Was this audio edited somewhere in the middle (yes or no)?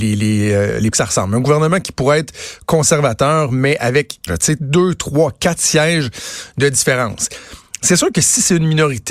yes